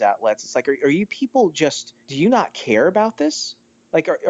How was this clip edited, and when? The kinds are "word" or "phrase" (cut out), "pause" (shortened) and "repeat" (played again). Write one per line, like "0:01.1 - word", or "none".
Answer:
0:02.0 - pause